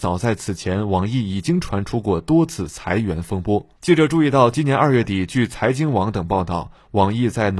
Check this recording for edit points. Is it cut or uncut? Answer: cut